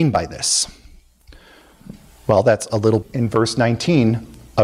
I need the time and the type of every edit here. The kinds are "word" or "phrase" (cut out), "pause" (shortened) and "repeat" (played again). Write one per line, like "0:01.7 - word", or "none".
0:02.1 - pause
0:02.7 - phrase
0:03.0 - word

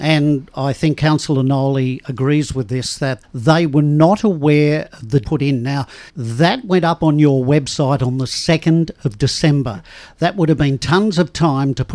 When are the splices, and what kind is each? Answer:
0:03.2 - word
0:05.2 - phrase
0:06.1 - pause

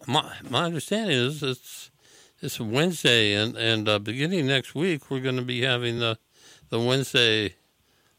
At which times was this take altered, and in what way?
none

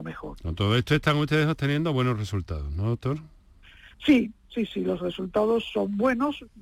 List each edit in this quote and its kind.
0:03.9 - pause

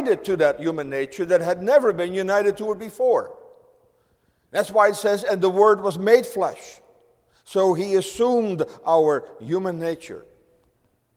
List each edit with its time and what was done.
none

